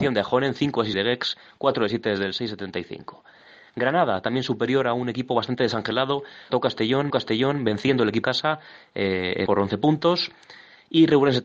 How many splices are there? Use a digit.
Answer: 5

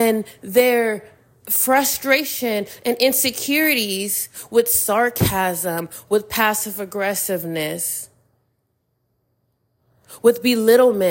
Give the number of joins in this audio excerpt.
0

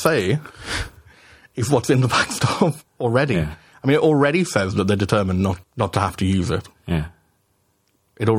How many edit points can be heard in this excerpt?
1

